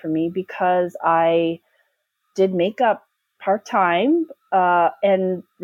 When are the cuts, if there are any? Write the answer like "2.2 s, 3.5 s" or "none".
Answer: none